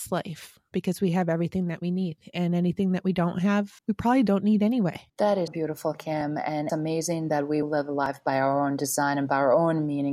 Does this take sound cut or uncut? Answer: cut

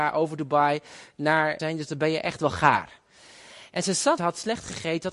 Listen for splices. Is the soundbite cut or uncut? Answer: cut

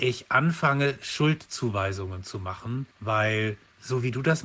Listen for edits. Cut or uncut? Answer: cut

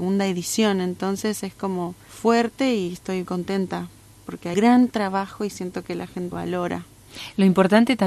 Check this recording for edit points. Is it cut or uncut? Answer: cut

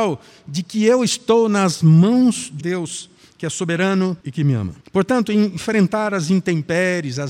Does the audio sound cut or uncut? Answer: cut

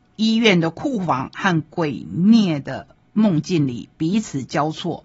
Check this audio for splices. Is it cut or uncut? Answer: uncut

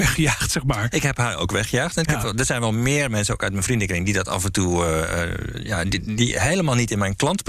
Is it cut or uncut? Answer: uncut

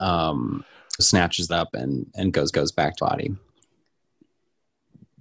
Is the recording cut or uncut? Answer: cut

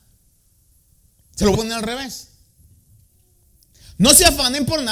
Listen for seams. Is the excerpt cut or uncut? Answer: cut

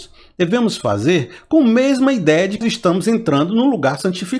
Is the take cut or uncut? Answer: cut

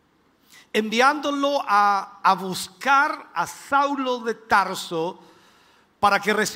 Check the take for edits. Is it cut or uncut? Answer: uncut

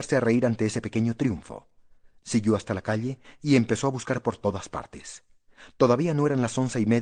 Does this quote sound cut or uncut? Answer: uncut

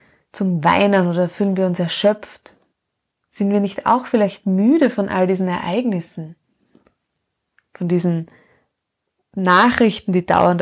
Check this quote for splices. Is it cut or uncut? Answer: uncut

